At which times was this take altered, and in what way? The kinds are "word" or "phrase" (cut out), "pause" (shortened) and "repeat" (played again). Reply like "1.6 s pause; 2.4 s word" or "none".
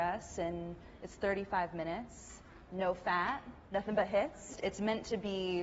3.7 s pause